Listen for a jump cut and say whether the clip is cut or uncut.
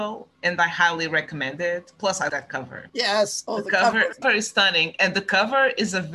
cut